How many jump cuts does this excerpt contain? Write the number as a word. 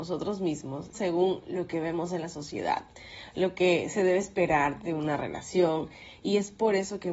one